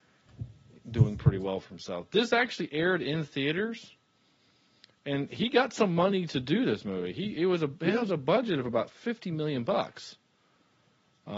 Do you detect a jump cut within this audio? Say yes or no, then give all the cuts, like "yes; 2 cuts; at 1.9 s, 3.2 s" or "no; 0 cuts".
no; 0 cuts